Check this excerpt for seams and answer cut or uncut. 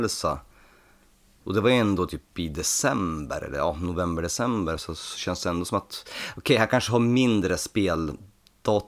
uncut